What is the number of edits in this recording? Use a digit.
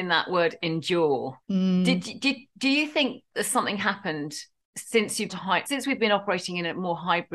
4